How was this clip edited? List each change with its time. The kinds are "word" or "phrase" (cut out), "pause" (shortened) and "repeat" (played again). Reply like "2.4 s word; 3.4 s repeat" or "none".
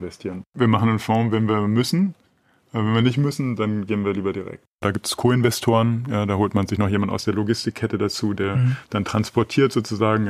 none